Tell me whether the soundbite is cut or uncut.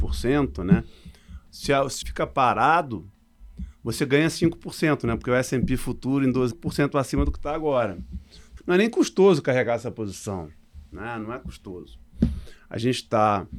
cut